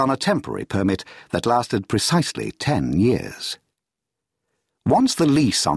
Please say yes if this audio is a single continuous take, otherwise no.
yes